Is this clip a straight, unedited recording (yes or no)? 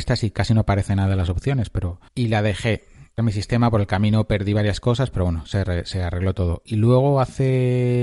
no